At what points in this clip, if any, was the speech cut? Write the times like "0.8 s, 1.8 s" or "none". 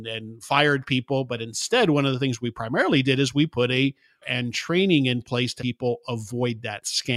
4.2 s, 5.6 s